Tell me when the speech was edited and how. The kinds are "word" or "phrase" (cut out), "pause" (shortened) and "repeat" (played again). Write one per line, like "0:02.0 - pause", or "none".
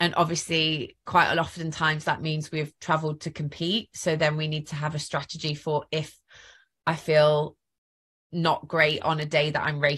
none